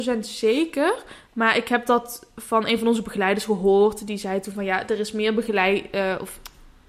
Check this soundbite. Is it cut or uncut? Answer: uncut